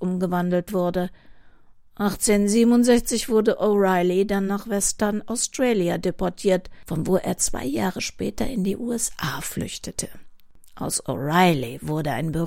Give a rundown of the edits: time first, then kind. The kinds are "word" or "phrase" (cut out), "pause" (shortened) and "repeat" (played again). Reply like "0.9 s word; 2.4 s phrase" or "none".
none

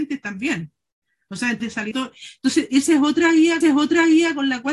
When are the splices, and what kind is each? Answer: 1.6 s word; 1.9 s phrase; 3.6 s repeat

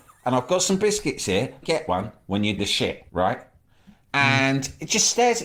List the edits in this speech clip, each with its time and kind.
1.6 s phrase; 2.6 s word; 3.1 s pause

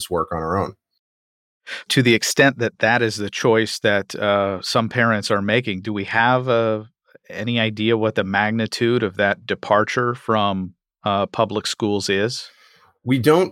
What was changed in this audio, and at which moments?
none

